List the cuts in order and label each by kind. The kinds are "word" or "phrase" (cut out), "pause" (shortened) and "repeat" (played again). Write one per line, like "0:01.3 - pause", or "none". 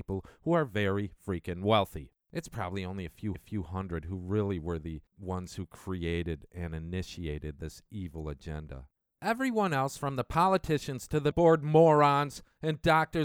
0:02.2 - pause
0:03.3 - repeat
0:05.1 - pause
0:11.3 - phrase